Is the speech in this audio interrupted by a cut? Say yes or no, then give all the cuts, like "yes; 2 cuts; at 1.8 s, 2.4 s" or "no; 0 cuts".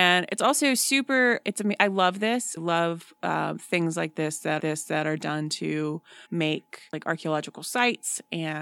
yes; 4 cuts; at 1.4 s, 2.6 s, 4.6 s, 6.2 s